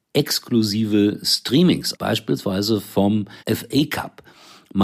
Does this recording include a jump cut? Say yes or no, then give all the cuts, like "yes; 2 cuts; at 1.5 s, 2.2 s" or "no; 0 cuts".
yes; 2 cuts; at 1.9 s, 3.4 s